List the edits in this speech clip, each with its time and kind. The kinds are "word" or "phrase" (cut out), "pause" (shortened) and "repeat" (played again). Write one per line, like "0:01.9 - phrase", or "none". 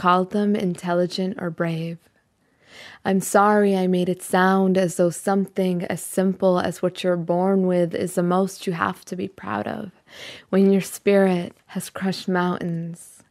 0:11.6 - pause